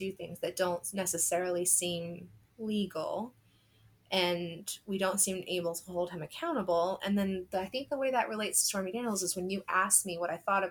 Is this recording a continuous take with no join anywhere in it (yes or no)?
yes